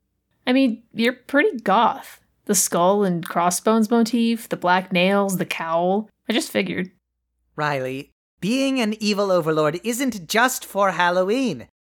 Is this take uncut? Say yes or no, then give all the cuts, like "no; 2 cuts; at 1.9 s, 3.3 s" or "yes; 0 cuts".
no; 1 cut; at 6.2 s